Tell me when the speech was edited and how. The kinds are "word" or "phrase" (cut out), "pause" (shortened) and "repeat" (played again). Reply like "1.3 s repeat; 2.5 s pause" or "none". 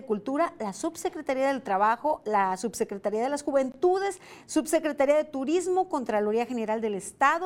none